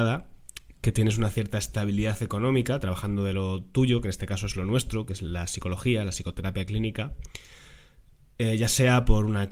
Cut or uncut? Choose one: uncut